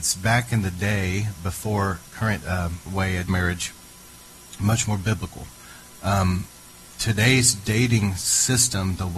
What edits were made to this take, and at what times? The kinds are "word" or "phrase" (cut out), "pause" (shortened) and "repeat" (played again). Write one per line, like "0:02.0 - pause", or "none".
0:02.1 - word
0:02.4 - phrase
0:02.9 - phrase
0:03.3 - phrase